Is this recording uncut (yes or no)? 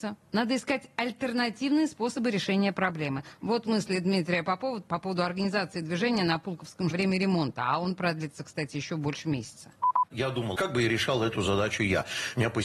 no